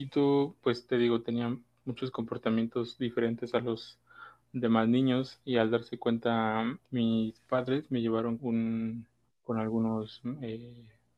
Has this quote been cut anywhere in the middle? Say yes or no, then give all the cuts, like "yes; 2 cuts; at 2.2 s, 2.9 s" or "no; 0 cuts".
yes; 3 cuts; at 6.8 s, 8.4 s, 9.2 s